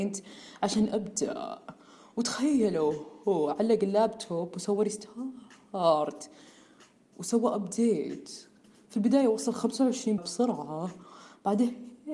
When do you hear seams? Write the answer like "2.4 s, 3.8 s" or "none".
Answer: 10.2 s